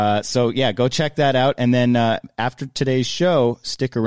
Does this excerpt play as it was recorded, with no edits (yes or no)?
yes